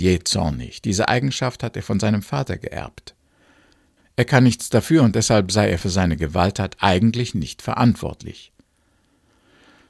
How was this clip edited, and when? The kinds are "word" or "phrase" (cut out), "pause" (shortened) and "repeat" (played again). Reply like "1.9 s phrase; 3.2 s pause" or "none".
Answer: none